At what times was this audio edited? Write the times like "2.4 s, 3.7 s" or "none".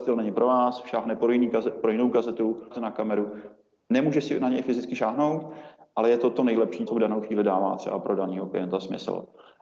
2.7 s, 6.9 s